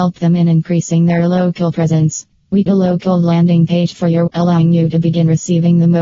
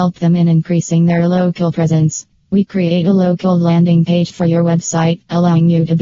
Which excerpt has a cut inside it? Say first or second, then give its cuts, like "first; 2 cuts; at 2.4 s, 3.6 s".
first; 2 cuts; at 2.7 s, 4.3 s